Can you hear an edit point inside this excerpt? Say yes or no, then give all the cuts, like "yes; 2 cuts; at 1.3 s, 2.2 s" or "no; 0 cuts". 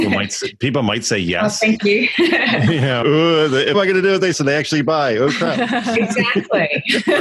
yes; 3 cuts; at 3.0 s, 3.7 s, 4.3 s